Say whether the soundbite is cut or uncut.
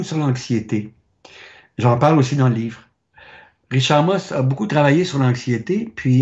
uncut